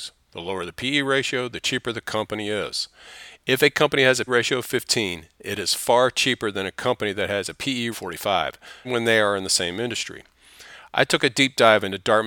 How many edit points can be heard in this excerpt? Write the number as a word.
three